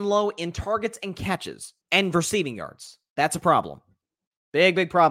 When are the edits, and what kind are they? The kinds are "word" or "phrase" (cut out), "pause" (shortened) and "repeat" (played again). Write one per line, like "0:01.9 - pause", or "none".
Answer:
0:01.8 - pause